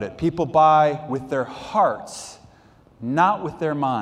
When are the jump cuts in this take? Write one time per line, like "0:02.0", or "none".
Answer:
none

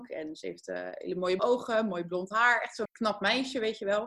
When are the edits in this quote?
0:01.4
0:02.9

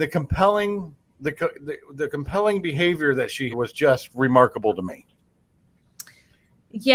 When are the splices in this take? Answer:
0:01.0
0:03.5

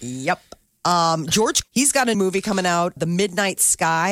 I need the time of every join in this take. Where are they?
0:01.6
0:02.1
0:03.0

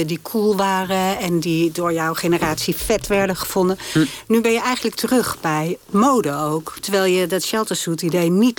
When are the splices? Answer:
0:04.9

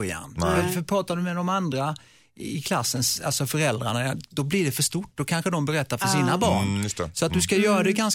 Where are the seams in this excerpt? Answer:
none

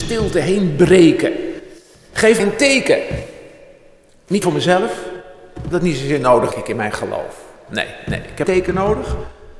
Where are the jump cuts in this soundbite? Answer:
0:02.4
0:04.4
0:05.7
0:06.5
0:08.4

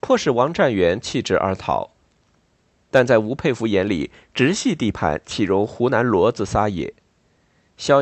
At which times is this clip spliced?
none

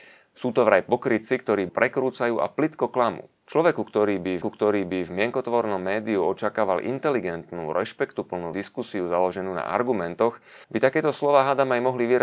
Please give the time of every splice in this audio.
0:01.7
0:03.4
0:04.4
0:08.5
0:10.6

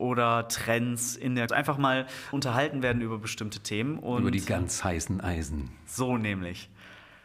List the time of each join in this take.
0:01.5
0:02.3

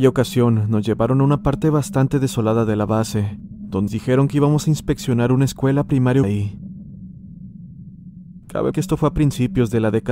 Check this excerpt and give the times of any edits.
0:03.9
0:06.2
0:08.7

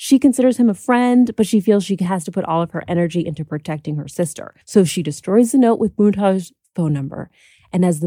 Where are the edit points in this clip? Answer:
0:04.6

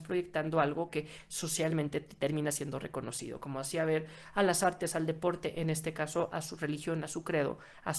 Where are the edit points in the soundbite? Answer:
none

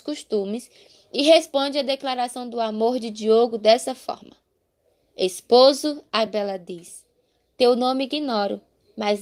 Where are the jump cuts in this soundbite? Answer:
none

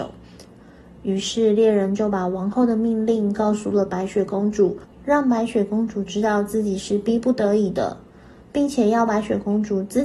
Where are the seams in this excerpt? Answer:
0:04.9

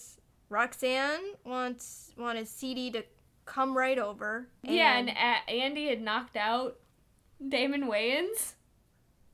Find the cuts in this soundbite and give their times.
none

